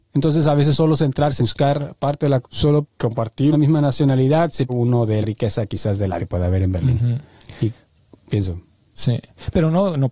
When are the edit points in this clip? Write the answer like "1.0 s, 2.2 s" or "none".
1.4 s, 2.4 s, 2.8 s, 3.5 s, 4.7 s, 5.2 s, 6.2 s